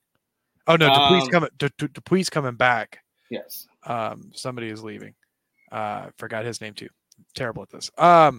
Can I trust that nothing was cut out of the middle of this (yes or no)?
yes